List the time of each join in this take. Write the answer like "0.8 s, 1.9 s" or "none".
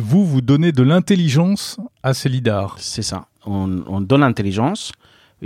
none